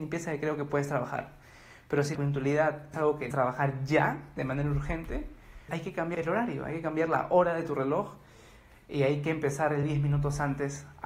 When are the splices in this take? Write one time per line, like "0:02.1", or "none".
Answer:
0:02.1
0:02.9
0:03.3
0:05.7
0:06.1
0:09.8